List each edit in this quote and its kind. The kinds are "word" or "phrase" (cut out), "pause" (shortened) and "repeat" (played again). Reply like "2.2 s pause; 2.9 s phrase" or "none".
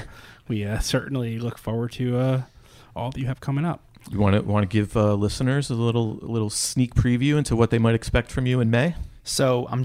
none